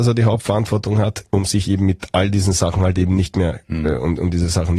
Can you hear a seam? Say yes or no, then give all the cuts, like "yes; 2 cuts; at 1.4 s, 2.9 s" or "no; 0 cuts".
no; 0 cuts